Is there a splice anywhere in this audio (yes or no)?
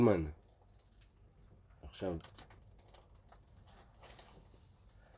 no